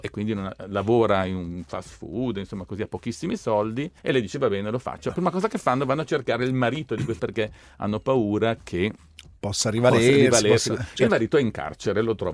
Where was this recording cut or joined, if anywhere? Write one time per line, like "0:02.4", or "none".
0:04.0
0:07.2